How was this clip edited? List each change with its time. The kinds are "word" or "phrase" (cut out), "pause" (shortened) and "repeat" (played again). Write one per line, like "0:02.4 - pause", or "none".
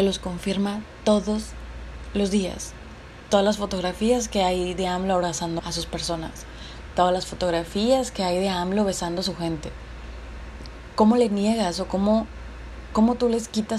0:05.6 - word